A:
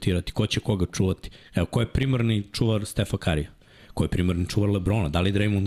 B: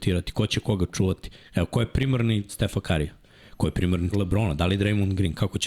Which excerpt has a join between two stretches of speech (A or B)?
B